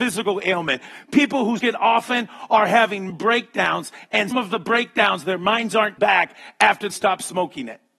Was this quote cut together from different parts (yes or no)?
yes